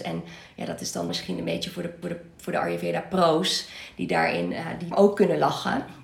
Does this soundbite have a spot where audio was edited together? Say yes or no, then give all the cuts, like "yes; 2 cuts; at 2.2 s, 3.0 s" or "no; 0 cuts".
yes; 3 cuts; at 1.1 s, 2.0 s, 4.9 s